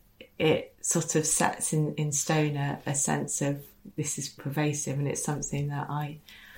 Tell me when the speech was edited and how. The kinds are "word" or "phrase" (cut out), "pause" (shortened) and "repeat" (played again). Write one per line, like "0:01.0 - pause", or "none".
0:03.9 - word
0:04.4 - word